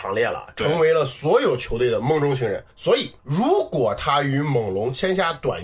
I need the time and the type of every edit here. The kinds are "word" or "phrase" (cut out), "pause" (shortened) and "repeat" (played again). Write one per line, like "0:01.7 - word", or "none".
0:02.7 - pause